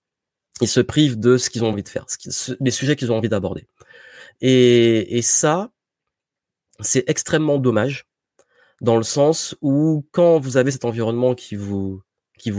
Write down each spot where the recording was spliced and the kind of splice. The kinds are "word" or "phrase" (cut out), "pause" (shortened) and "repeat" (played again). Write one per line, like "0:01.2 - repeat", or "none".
0:01.7 - word